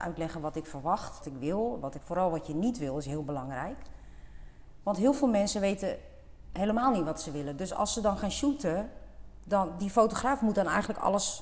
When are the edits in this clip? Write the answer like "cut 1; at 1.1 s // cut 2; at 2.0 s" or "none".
cut 1; at 1.2 s // cut 2; at 2.0 s